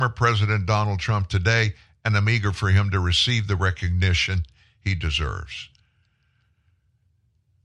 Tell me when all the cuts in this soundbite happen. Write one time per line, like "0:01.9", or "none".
none